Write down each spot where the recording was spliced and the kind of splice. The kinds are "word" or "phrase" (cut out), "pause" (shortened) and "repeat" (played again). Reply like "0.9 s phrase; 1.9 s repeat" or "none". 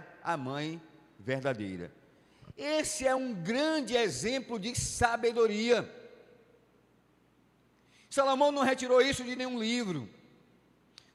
none